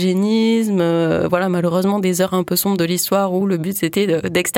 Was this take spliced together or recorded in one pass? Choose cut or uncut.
uncut